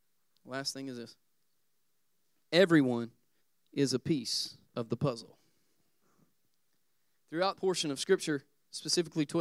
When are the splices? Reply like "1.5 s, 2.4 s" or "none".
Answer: 3.4 s, 4.6 s, 7.6 s